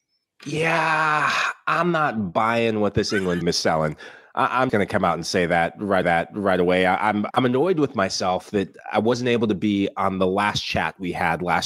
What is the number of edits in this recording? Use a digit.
4